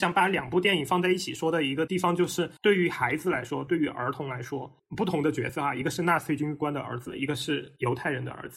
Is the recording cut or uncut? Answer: cut